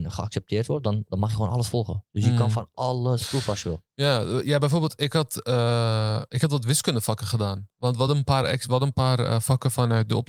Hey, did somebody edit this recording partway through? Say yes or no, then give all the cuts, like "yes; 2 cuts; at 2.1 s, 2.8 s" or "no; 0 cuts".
no; 0 cuts